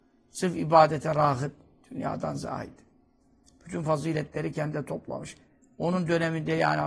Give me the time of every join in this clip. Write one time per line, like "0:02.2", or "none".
none